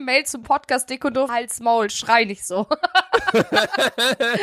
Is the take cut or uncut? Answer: cut